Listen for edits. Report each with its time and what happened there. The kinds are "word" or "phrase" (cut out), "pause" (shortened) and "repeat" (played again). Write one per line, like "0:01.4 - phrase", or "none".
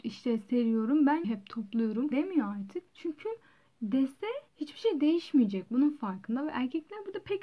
0:01.2 - word
0:02.1 - word
0:02.9 - pause
0:04.5 - pause